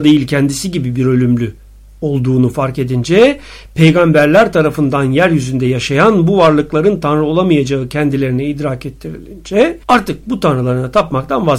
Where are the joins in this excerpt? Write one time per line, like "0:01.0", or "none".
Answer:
0:09.8

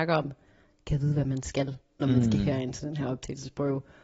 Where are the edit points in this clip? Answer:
none

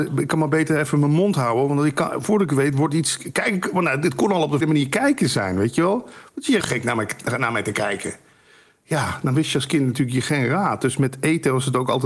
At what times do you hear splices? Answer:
0:04.6
0:06.6

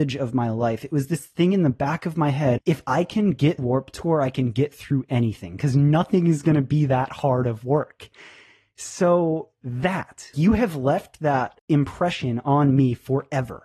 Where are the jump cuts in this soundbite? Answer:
0:02.6
0:03.6
0:10.3

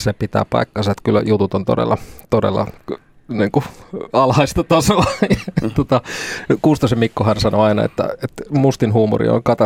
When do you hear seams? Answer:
none

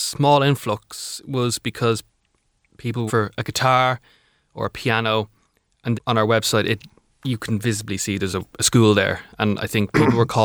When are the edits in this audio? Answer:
0:03.1
0:05.9

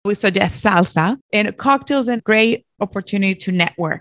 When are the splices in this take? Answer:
0:01.2
0:02.2

